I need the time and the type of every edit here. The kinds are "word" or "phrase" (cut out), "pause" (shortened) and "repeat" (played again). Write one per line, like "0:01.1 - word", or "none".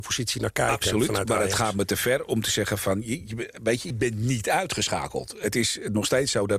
0:03.9 - word